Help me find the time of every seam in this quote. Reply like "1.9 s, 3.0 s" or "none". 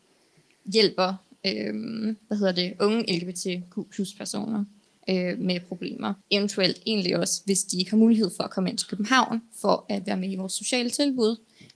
6.2 s